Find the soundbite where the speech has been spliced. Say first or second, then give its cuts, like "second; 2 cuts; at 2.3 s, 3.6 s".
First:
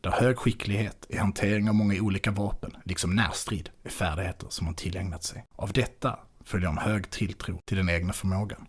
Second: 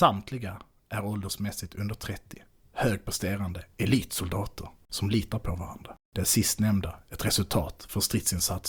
first; 1 cut; at 5.5 s